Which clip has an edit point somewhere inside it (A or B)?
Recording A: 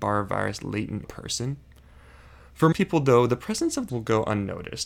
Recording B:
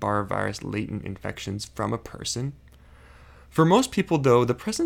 A